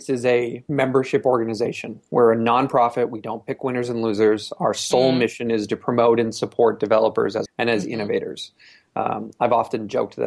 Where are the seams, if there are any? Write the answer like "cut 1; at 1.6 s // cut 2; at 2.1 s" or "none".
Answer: cut 1; at 7.5 s